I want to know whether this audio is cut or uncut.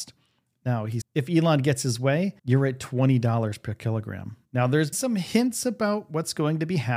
cut